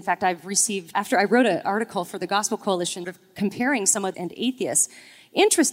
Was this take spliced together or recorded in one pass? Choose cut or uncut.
cut